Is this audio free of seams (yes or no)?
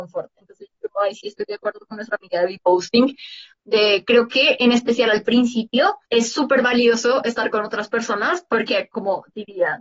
no